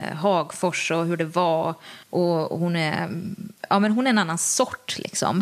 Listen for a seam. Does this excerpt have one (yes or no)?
yes